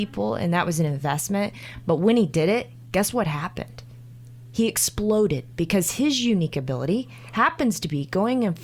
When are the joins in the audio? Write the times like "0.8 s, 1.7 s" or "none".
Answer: none